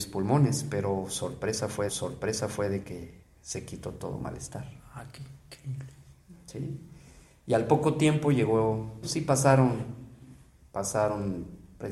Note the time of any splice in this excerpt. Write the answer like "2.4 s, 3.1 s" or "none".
1.9 s, 3.2 s, 9.0 s, 10.5 s